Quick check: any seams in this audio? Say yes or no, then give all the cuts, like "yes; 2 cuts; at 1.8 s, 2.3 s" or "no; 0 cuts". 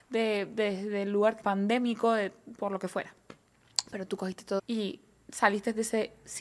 yes; 2 cuts; at 1.4 s, 4.6 s